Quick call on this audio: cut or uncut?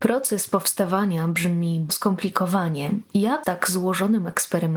cut